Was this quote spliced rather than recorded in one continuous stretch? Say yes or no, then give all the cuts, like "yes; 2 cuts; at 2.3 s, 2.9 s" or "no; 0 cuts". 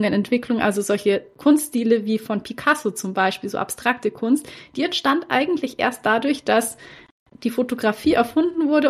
no; 0 cuts